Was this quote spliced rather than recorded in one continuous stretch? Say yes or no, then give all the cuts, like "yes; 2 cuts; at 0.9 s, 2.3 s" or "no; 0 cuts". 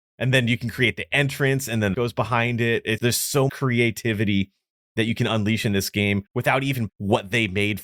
yes; 5 cuts; at 1.9 s, 3.0 s, 3.5 s, 6.3 s, 6.9 s